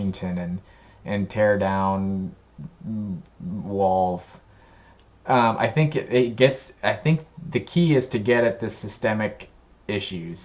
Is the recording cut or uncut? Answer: uncut